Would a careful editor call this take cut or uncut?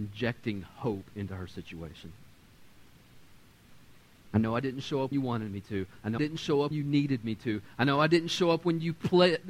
cut